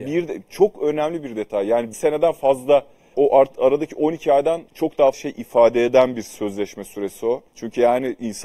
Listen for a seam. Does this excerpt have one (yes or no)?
yes